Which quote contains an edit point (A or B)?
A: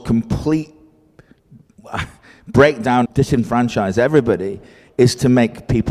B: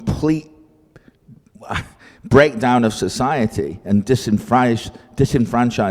A